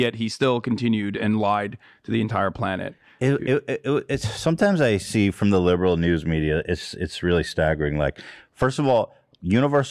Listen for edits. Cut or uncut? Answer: uncut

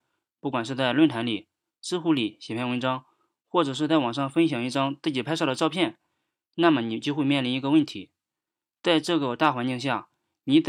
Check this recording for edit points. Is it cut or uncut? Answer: uncut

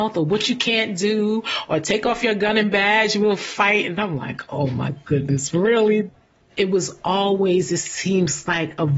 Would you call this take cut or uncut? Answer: uncut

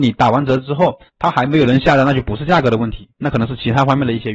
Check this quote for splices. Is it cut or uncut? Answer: cut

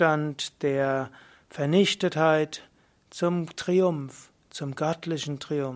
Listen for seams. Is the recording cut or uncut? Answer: uncut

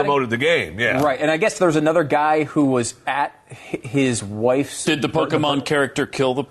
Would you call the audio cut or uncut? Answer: uncut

